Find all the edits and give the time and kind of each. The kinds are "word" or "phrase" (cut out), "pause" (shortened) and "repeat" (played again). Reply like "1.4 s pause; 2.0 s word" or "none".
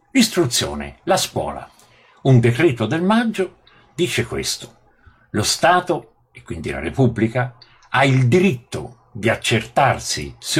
none